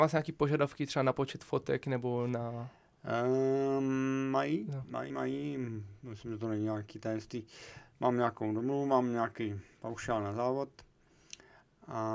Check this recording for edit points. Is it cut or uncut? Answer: cut